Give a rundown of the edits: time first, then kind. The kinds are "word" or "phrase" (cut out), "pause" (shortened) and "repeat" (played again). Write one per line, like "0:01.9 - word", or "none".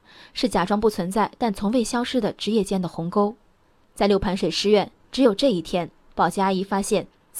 none